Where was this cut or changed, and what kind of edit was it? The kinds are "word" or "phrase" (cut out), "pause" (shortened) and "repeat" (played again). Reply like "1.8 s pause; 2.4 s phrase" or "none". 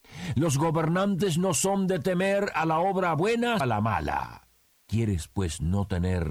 3.6 s word